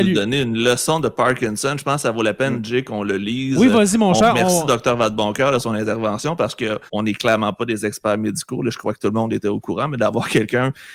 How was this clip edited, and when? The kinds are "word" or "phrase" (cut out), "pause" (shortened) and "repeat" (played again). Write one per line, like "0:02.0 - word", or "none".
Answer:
0:06.9 - pause